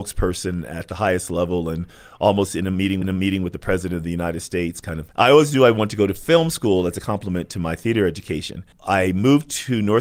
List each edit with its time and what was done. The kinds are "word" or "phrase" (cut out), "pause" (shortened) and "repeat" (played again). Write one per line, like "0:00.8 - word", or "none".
0:03.0 - repeat
0:05.1 - word
0:08.7 - pause